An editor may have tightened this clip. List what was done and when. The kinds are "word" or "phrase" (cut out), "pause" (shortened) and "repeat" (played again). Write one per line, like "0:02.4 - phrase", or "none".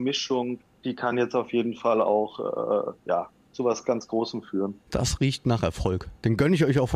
none